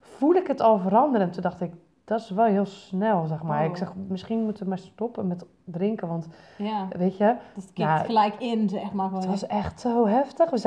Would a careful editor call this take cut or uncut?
uncut